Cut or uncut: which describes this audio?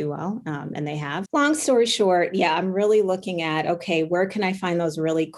cut